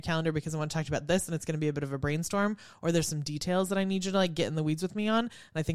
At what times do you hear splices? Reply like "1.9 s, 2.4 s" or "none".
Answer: none